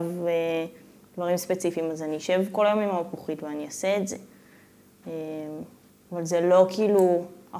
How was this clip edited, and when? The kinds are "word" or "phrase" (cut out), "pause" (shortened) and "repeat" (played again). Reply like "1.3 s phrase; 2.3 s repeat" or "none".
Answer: 5.9 s pause